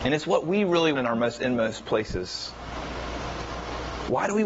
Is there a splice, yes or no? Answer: yes